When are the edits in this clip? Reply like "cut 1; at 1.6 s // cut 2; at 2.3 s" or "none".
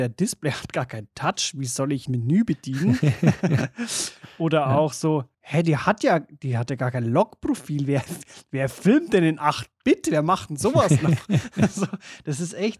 cut 1; at 2.1 s // cut 2; at 5.3 s